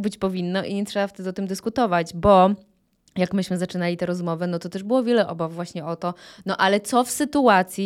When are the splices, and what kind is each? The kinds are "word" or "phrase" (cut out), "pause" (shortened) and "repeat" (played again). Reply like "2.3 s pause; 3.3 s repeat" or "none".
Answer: none